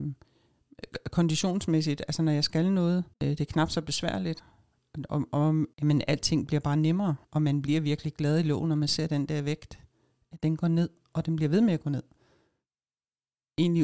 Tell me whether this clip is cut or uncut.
cut